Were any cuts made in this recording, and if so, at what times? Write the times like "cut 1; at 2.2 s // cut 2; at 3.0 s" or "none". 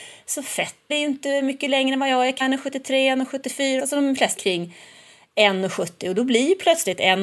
cut 1; at 0.9 s // cut 2; at 2.4 s // cut 3; at 3.8 s // cut 4; at 4.4 s